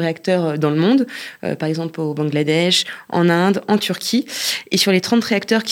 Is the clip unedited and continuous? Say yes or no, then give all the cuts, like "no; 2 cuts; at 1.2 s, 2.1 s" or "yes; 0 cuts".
yes; 0 cuts